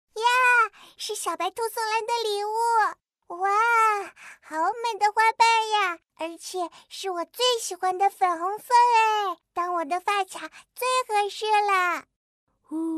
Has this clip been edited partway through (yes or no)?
yes